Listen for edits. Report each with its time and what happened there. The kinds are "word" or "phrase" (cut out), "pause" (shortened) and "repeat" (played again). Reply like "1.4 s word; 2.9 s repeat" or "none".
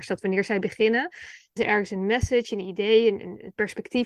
1.6 s word